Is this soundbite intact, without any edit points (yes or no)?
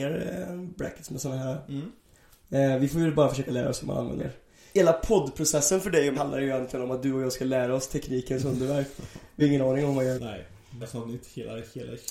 no